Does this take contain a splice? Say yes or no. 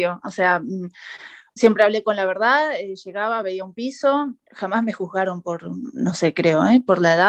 no